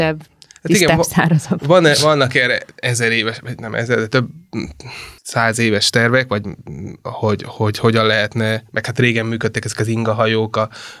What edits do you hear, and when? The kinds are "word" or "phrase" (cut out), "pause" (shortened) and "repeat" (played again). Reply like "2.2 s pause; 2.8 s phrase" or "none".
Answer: 5.2 s pause